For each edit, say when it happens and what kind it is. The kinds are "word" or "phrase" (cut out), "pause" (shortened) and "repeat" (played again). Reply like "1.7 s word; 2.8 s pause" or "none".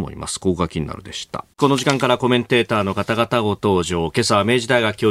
1.5 s pause